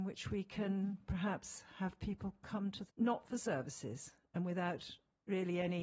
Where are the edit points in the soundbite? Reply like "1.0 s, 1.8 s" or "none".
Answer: 2.9 s